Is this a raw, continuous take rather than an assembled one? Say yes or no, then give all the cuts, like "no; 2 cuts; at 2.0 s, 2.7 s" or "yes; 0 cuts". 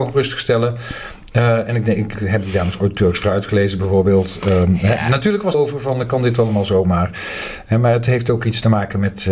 no; 2 cuts; at 2.2 s, 5.5 s